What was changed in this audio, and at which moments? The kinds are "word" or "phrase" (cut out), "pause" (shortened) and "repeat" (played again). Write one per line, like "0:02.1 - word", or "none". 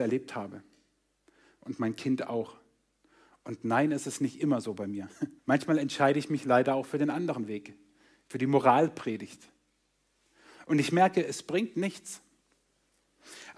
0:05.4 - pause